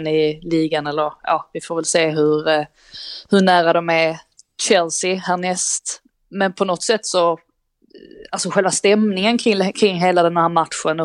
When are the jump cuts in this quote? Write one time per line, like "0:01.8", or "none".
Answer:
none